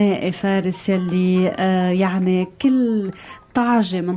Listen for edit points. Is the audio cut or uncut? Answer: uncut